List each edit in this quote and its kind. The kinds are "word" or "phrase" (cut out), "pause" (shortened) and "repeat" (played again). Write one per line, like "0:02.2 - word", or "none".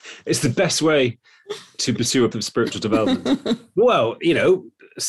0:02.3 - word